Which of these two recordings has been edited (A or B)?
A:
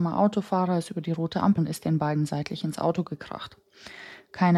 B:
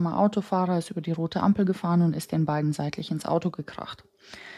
A